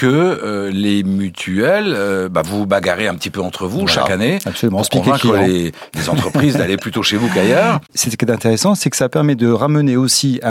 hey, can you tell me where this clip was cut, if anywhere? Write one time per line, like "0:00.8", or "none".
0:07.8